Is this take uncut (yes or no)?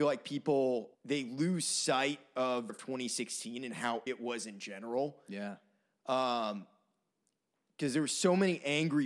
no